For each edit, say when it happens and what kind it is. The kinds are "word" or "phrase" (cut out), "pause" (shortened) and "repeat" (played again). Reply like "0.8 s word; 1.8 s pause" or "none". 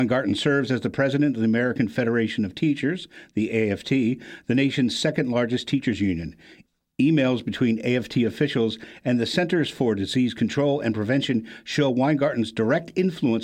none